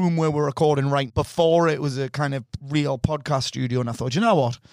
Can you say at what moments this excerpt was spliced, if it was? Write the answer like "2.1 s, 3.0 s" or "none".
1.1 s